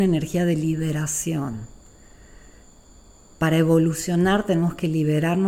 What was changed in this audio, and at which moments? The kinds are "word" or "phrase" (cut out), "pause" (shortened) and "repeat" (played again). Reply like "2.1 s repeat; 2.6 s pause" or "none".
none